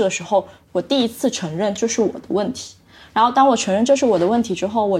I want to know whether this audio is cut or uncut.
uncut